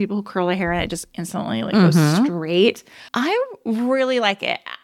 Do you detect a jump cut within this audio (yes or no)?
yes